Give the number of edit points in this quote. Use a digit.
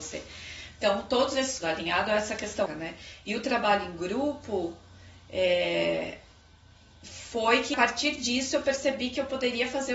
3